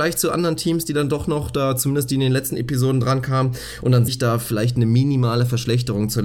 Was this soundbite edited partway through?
yes; 1 cut; at 4.1 s

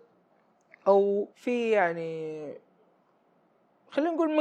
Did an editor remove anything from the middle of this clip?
yes; 1 cut; at 1.3 s

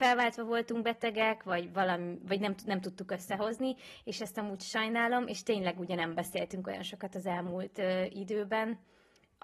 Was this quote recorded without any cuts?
yes; 0 cuts

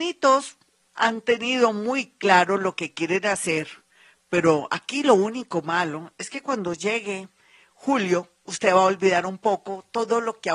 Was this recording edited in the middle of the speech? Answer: no; 0 cuts

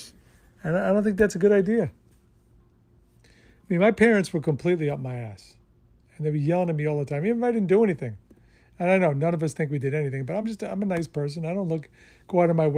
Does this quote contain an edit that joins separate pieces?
no; 0 cuts

